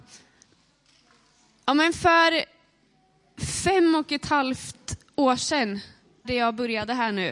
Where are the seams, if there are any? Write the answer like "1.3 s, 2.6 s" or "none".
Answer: 6.2 s